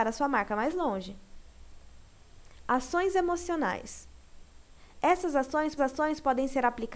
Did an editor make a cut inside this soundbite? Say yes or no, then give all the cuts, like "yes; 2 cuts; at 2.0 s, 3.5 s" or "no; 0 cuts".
yes; 1 cut; at 5.8 s